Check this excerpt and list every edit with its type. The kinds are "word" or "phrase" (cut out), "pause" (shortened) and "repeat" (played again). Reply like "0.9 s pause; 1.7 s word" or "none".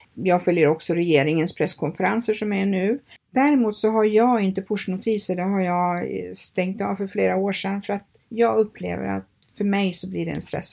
none